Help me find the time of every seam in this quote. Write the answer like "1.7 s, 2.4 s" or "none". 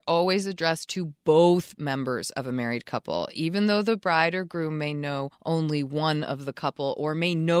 5.3 s